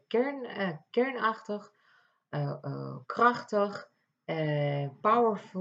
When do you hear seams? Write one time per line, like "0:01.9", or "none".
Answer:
0:03.0